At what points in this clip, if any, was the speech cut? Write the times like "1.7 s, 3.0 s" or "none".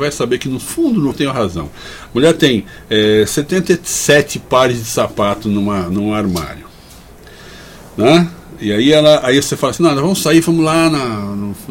1.1 s